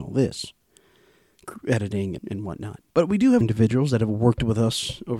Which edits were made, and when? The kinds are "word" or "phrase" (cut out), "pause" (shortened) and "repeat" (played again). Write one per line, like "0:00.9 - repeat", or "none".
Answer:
0:02.2 - word
0:02.9 - pause
0:03.4 - word